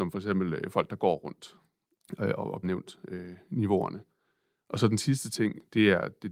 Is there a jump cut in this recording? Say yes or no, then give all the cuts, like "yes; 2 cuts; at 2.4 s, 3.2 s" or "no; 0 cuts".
yes; 1 cut; at 2.6 s